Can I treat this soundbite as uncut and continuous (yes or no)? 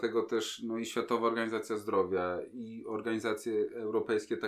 yes